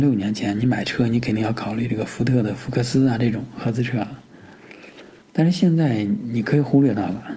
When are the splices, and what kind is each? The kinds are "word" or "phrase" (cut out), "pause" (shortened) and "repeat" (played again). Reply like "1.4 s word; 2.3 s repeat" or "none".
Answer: 5.2 s pause